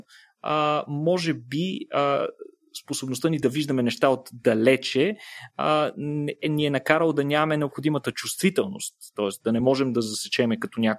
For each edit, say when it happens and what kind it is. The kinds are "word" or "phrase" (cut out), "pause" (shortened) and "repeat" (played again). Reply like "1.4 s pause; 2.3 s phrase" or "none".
none